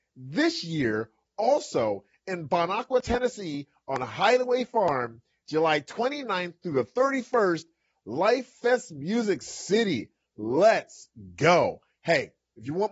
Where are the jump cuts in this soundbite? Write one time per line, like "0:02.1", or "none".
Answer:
none